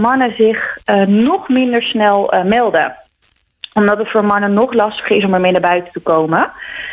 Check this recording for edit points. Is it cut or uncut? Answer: uncut